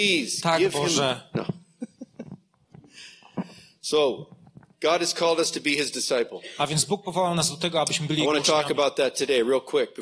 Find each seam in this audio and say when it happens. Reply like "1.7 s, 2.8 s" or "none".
none